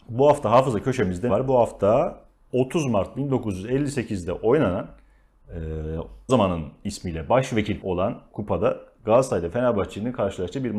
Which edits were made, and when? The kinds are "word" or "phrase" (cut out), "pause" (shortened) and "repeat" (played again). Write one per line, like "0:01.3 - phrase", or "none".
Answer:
0:01.3 - word
0:06.3 - word
0:07.8 - word
0:08.3 - word